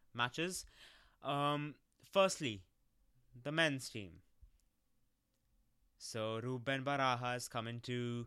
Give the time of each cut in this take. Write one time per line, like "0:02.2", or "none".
none